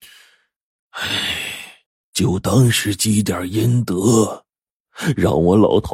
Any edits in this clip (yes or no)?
yes